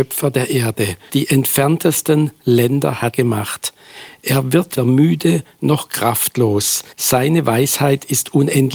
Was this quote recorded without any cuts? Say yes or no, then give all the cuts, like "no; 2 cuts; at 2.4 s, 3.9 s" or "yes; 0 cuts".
no; 4 cuts; at 1.1 s, 3.1 s, 4.8 s, 6.9 s